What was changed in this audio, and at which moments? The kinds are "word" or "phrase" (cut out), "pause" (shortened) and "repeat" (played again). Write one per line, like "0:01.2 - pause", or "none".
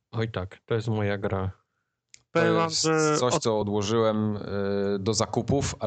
none